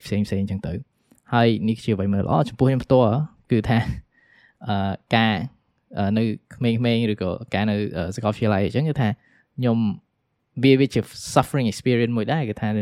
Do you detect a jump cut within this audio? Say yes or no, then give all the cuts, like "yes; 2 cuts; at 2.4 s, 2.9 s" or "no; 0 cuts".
no; 0 cuts